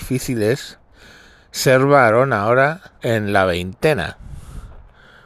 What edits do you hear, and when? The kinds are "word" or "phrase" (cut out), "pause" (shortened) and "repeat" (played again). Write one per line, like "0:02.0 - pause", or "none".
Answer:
0:03.0 - pause

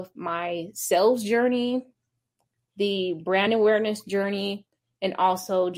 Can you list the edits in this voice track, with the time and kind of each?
none

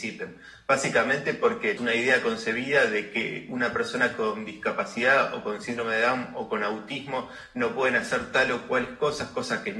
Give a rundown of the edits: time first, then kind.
0:01.8 - word

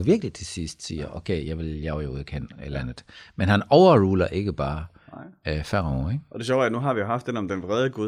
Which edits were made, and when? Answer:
none

